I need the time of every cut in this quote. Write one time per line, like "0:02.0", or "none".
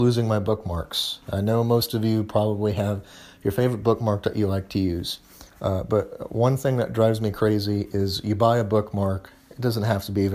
0:05.5